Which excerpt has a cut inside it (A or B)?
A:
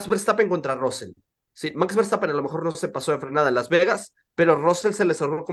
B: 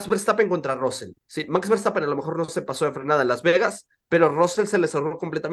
B